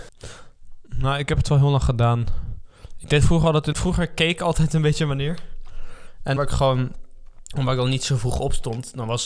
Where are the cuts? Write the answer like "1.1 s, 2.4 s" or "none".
3.7 s, 6.4 s